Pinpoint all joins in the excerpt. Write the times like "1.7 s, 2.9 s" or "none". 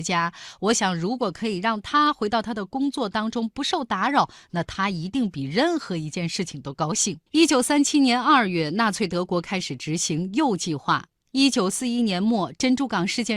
7.3 s

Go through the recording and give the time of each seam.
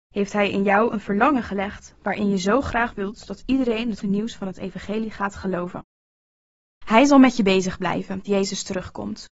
4.0 s, 8.3 s

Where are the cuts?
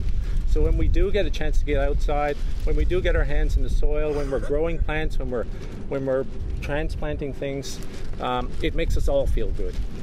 none

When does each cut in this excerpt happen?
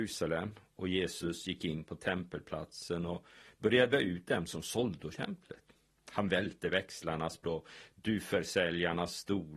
3.9 s, 5.1 s, 7.4 s

